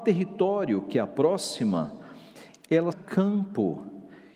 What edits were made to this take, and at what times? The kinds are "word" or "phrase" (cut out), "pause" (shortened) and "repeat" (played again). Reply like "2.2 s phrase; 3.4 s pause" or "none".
2.9 s word